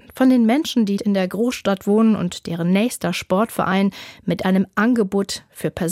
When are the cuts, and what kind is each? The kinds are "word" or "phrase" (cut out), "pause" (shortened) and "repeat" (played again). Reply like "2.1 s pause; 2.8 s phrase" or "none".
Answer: 1.0 s word